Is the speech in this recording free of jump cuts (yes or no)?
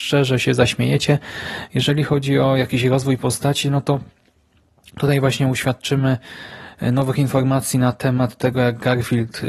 yes